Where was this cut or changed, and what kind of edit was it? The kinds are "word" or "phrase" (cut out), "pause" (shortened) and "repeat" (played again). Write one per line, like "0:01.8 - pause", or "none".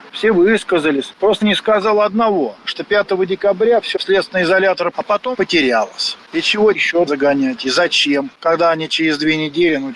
0:01.4 - word
0:04.0 - word
0:04.9 - word
0:05.3 - word
0:06.7 - word
0:07.1 - word